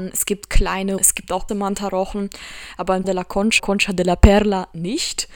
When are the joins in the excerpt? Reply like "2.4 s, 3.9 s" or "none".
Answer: 1.0 s, 1.5 s, 3.0 s, 3.6 s